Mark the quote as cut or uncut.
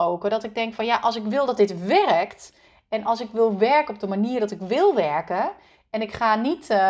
uncut